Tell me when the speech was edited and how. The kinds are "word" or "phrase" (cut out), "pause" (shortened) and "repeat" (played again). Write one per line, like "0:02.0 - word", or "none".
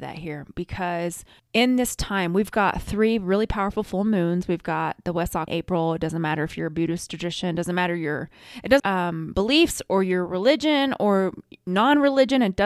0:01.4 - pause
0:05.5 - phrase
0:08.8 - phrase